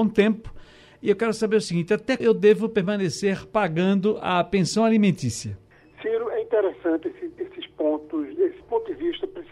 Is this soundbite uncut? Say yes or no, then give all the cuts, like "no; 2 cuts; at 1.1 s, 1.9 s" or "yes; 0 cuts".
no; 2 cuts; at 2.2 s, 5.7 s